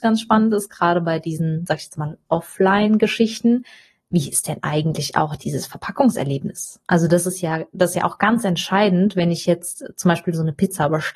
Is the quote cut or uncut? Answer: uncut